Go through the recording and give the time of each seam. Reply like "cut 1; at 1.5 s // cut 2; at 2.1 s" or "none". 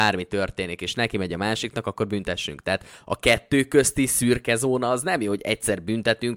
none